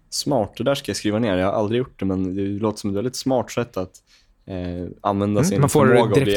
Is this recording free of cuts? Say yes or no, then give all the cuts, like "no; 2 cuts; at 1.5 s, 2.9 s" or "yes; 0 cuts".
yes; 0 cuts